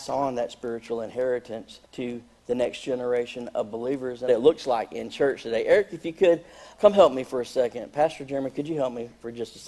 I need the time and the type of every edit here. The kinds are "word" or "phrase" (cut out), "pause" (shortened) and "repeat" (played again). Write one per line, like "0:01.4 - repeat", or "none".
0:01.8 - pause
0:04.3 - phrase
0:06.7 - word